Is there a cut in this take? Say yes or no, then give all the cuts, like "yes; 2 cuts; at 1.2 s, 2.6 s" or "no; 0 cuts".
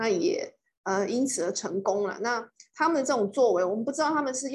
no; 0 cuts